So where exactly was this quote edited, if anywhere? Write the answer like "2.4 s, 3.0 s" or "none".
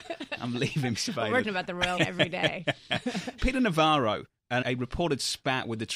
0.9 s, 1.4 s, 2.0 s, 3.4 s, 4.6 s